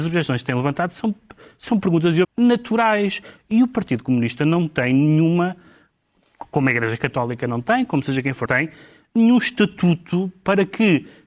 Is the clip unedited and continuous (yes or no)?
no